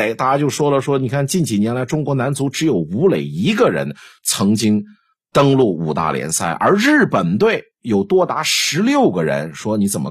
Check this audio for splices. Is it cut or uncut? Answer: uncut